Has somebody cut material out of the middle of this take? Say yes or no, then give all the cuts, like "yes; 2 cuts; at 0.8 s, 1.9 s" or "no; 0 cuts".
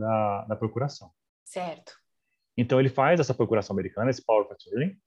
no; 0 cuts